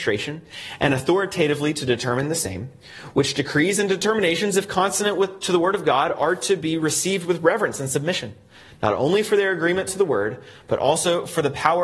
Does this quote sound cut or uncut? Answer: uncut